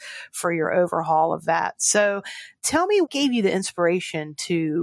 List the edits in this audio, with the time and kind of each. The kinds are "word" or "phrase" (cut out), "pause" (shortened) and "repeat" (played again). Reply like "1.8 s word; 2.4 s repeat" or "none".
3.1 s word

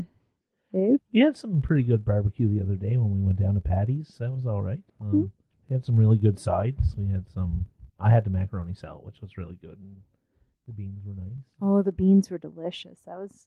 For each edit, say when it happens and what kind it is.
4.9 s pause; 5.5 s pause; 7.9 s pause

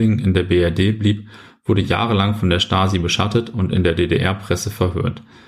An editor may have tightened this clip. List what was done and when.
none

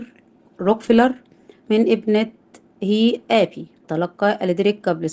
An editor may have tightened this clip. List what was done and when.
1.6 s word; 3.8 s word

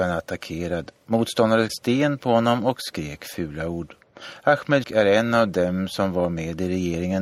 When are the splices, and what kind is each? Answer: 1.7 s word; 4.8 s word

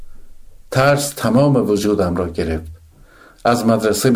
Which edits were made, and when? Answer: none

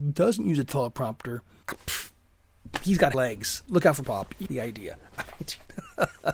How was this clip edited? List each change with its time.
1.6 s word; 3.1 s word; 4.0 s word; 4.5 s word

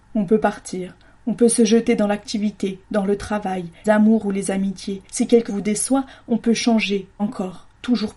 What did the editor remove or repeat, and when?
3.8 s word; 5.0 s pause; 5.5 s word; 7.2 s word

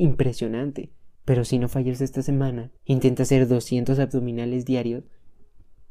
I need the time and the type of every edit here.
1.1 s pause; 2.8 s pause

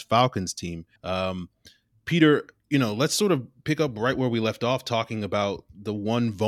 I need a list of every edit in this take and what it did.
1.0 s pause

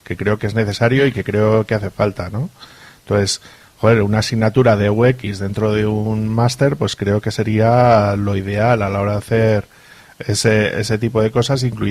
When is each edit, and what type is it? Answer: none

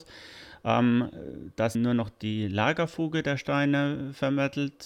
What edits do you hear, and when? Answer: 1.7 s word

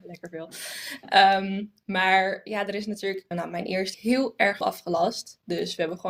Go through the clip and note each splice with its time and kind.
3.3 s phrase; 3.9 s phrase; 4.6 s word

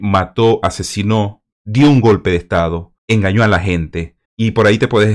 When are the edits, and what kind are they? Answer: 1.5 s pause; 3.0 s pause; 4.2 s pause

